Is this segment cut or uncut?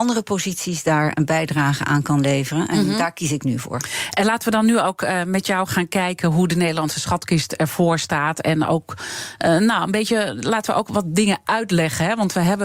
uncut